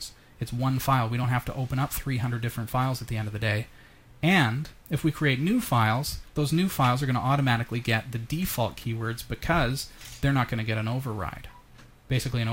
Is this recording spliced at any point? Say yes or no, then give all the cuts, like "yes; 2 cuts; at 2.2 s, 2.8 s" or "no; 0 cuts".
no; 0 cuts